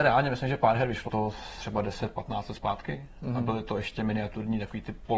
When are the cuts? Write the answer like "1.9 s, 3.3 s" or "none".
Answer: 1.1 s